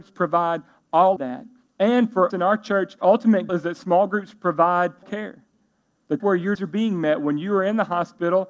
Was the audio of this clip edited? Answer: yes; 7 cuts; at 1.2 s, 2.3 s, 3.0 s, 3.5 s, 5.0 s, 6.2 s, 6.5 s

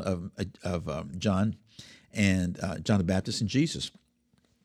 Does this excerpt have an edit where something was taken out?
no; 0 cuts

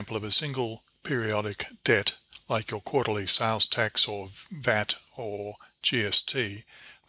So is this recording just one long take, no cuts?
yes; 0 cuts

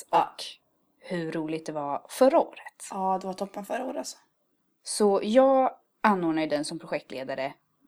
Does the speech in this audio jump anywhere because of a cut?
no; 0 cuts

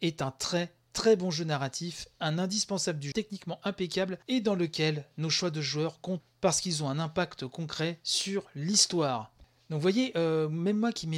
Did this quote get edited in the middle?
yes; 2 cuts; at 3.1 s, 6.2 s

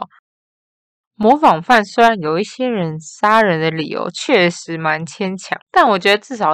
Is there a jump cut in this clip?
yes; 1 cut; at 5.6 s

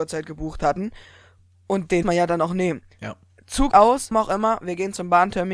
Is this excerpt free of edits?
no; 3 cuts; at 2.0 s, 3.7 s, 4.1 s

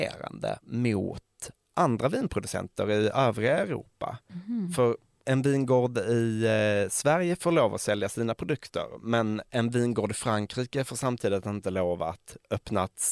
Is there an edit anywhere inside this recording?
no; 0 cuts

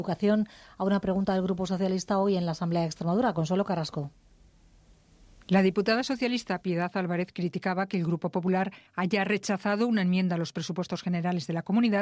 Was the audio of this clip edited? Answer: yes; 1 cut; at 8.9 s

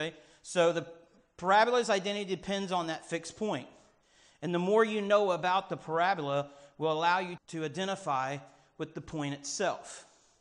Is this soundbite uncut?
no; 1 cut; at 7.4 s

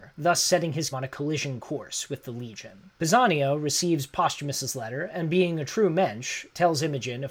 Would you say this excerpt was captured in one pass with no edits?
no; 2 cuts; at 0.9 s, 2.9 s

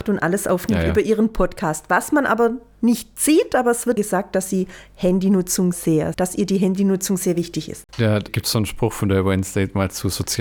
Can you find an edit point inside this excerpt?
yes; 4 cuts; at 4.0 s, 5.7 s, 6.1 s, 8.3 s

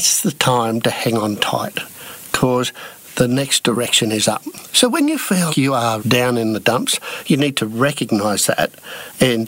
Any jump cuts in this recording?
yes; 2 cuts; at 5.5 s, 6.0 s

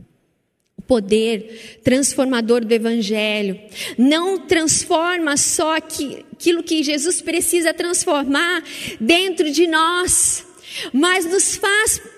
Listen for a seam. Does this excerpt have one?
no; 0 cuts

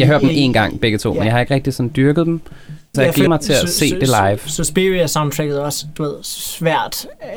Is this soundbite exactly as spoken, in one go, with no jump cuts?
no; 2 cuts; at 2.9 s, 3.3 s

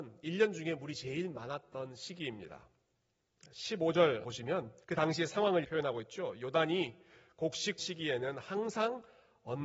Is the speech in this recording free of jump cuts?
no; 4 cuts; at 4.2 s, 4.8 s, 5.6 s, 7.8 s

